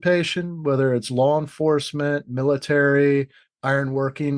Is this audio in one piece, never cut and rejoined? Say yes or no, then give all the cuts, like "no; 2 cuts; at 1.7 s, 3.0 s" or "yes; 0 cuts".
yes; 0 cuts